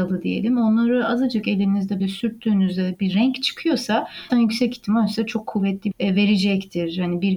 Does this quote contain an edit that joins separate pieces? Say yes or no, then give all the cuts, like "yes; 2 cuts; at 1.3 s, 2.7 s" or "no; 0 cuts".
yes; 3 cuts; at 2.0 s, 4.3 s, 5.9 s